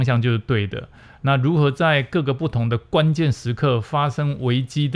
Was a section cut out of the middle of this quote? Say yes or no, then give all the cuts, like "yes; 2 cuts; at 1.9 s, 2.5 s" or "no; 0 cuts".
no; 0 cuts